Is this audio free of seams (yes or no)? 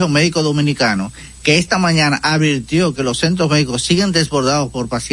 yes